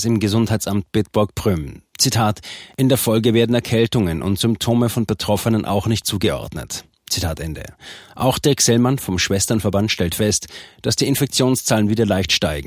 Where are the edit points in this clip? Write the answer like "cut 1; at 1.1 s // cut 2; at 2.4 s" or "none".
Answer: cut 1; at 6.0 s